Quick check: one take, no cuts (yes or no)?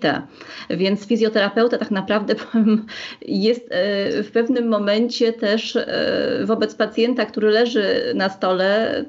yes